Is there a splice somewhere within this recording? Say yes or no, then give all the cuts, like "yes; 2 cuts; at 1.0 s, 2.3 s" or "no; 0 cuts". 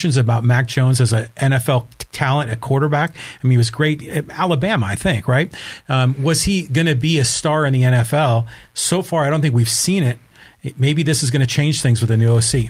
no; 0 cuts